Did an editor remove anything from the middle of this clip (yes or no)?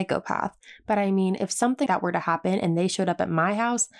yes